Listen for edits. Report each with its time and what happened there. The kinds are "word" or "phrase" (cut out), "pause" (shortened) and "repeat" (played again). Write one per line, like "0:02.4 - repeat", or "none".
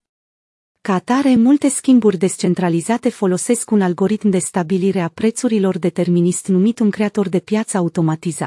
none

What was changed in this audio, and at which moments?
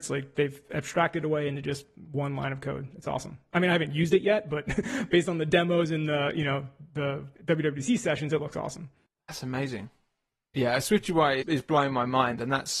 0:09.1 - pause
0:11.4 - word

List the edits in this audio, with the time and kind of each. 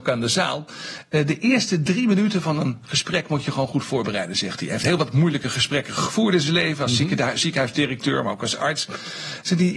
none

